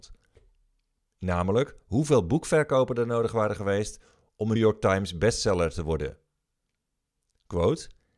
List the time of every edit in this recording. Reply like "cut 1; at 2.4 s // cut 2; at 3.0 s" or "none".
cut 1; at 4.6 s

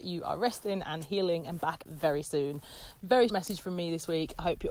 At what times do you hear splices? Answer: cut 1; at 1.9 s // cut 2; at 3.3 s

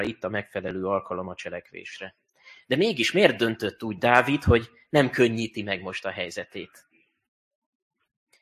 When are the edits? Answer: none

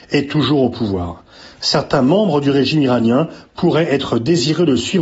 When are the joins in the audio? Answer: none

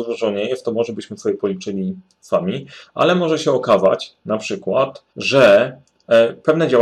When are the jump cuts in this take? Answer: cut 1; at 5.1 s

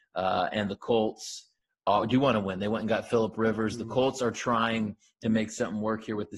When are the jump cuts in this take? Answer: none

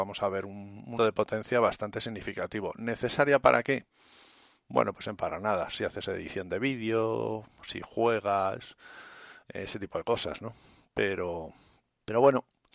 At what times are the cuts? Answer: cut 1; at 1.0 s // cut 2; at 5.2 s

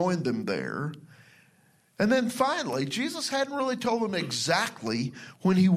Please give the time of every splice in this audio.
none

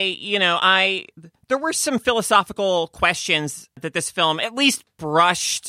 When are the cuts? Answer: none

